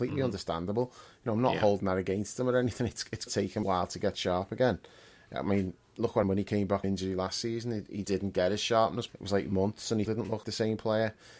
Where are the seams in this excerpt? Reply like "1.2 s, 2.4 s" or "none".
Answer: 3.3 s, 3.6 s, 6.2 s, 6.8 s, 8.0 s, 9.1 s, 10.1 s, 10.4 s